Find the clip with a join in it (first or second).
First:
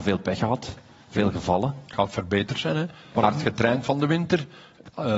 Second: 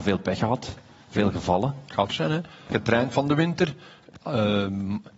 second